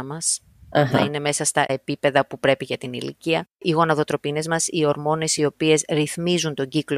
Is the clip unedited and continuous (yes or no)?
yes